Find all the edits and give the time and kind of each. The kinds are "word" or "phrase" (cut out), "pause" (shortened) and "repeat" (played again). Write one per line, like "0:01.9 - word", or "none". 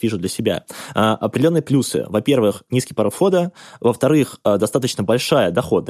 none